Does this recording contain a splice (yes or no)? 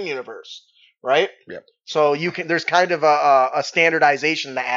no